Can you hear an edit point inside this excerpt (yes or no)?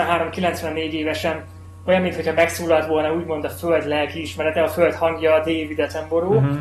no